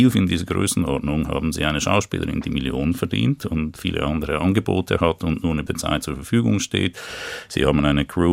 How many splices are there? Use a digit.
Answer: 1